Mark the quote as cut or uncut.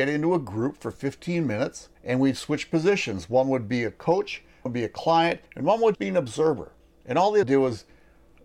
cut